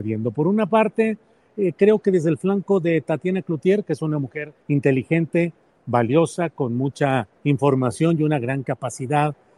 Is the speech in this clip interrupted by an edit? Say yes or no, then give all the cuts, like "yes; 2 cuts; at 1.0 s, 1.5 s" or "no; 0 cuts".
yes; 2 cuts; at 4.6 s, 7.3 s